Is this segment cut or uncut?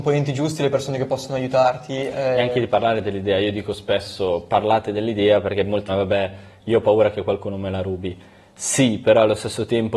cut